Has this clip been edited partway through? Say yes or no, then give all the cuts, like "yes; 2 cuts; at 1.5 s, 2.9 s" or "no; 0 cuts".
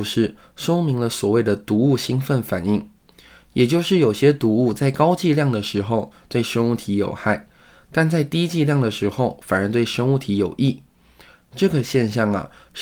no; 0 cuts